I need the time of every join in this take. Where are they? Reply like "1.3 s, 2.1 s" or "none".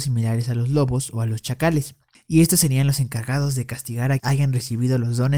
4.2 s